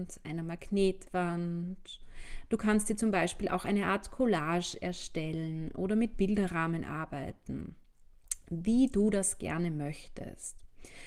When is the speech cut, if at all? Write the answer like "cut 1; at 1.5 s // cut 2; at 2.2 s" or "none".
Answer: none